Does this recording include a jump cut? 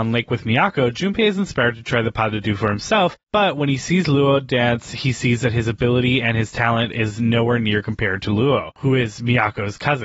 no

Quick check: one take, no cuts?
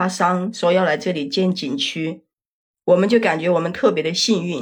yes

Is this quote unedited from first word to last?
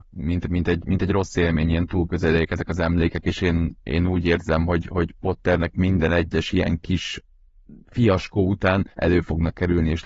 no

